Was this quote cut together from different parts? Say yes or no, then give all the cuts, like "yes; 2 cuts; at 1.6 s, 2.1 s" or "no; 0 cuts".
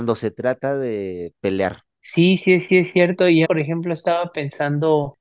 yes; 2 cuts; at 2.7 s, 3.4 s